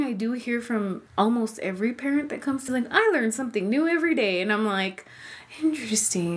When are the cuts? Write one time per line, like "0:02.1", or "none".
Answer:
0:01.1
0:02.7